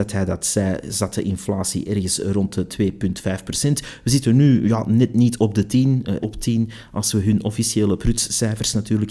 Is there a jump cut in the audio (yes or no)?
yes